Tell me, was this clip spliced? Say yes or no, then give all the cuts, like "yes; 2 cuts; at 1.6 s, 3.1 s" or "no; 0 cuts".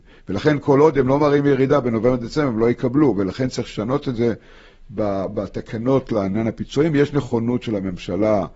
no; 0 cuts